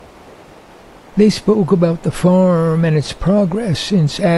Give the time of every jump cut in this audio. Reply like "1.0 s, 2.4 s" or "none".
none

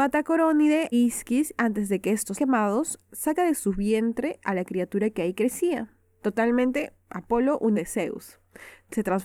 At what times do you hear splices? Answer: 0.9 s, 1.6 s, 2.3 s, 7.8 s

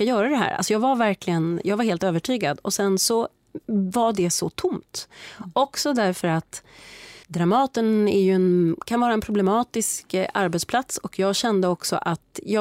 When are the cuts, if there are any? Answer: 3.6 s, 7.2 s

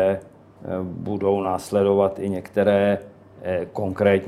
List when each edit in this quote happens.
none

